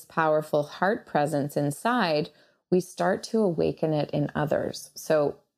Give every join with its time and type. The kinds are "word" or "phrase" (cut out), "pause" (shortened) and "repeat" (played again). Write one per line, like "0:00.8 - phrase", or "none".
none